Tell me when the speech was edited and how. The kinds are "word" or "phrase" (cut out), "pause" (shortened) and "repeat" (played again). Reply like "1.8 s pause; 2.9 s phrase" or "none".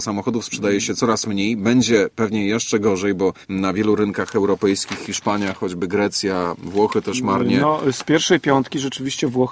3.4 s pause